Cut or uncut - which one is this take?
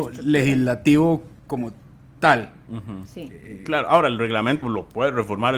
cut